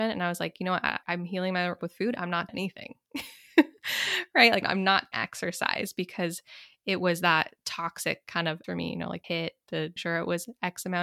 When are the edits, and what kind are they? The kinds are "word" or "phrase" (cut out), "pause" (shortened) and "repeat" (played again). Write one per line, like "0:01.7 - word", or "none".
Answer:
0:01.0 - word
0:01.8 - word
0:02.5 - word
0:04.6 - word
0:05.1 - word
0:08.6 - word
0:09.2 - word
0:10.0 - word